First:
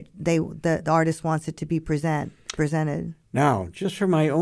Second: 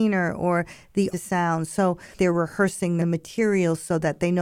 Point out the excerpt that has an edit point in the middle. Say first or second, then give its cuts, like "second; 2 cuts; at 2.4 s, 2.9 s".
second; 3 cuts; at 1.1 s, 2.2 s, 3.0 s